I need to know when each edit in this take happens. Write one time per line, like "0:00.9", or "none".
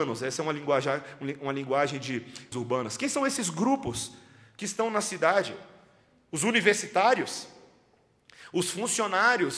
0:02.5